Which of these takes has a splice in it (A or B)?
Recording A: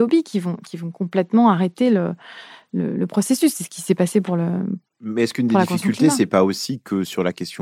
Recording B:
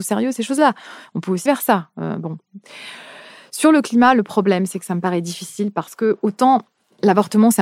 B